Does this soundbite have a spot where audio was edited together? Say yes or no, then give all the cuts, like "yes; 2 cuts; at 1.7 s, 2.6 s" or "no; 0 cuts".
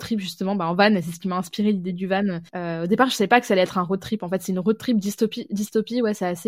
yes; 1 cut; at 2.5 s